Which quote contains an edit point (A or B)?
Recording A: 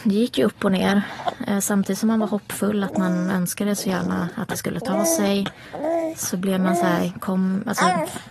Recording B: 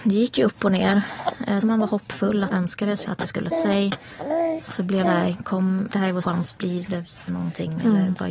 B